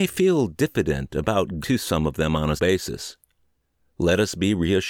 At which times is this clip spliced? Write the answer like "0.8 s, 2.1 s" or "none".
1.6 s, 2.6 s